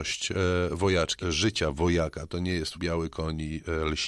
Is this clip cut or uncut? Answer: cut